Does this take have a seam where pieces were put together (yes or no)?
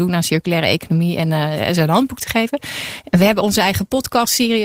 no